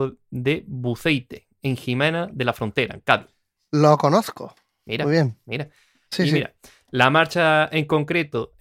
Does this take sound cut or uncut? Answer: uncut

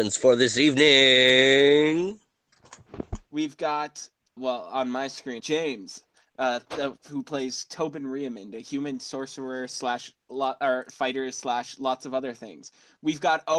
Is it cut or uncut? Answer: cut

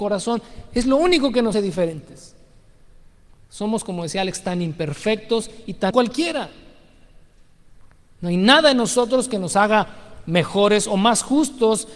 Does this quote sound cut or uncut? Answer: cut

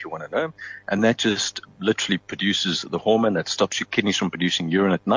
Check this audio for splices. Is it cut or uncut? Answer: uncut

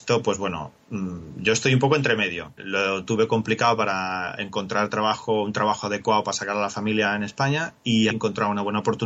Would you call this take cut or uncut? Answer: cut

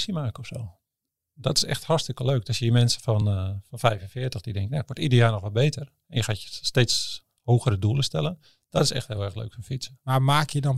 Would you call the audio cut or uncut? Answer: uncut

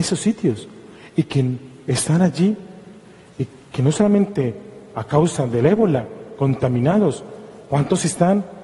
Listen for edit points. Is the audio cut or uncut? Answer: uncut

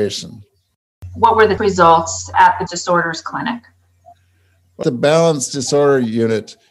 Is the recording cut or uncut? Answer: cut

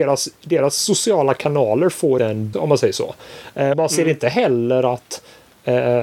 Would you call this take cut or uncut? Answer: cut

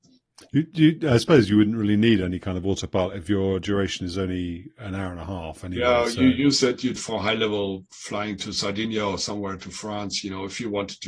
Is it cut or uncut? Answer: cut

